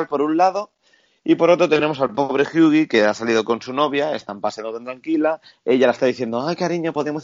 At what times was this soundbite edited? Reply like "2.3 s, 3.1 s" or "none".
none